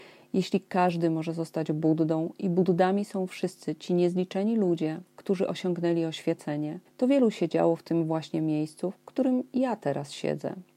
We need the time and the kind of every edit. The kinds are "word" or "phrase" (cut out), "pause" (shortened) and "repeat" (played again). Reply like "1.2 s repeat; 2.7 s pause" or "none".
5.1 s pause; 6.9 s pause